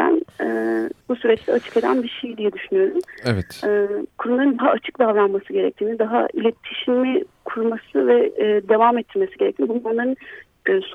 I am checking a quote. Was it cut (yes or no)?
yes